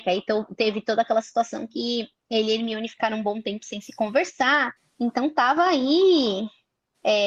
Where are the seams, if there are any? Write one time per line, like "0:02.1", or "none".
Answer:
0:04.8